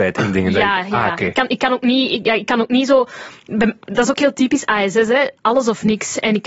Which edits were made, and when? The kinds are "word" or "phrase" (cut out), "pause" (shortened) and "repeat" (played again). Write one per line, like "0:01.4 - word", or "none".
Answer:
none